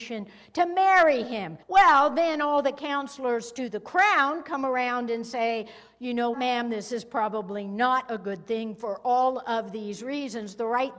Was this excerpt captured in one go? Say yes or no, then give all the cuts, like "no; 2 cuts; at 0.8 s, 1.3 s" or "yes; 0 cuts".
no; 2 cuts; at 1.6 s, 6.3 s